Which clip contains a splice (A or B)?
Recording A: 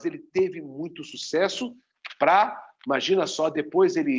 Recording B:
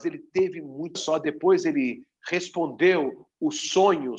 B